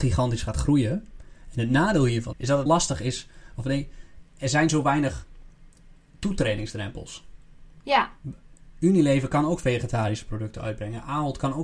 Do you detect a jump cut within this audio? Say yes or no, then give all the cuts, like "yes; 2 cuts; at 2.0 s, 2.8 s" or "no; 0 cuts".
yes; 2 cuts; at 2.3 s, 2.7 s